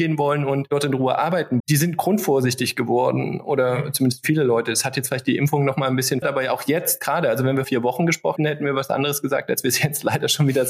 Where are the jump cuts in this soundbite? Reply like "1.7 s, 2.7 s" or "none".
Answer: 1.6 s, 6.2 s, 7.6 s, 8.4 s